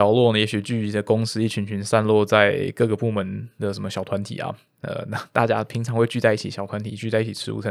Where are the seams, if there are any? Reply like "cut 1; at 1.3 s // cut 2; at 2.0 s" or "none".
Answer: none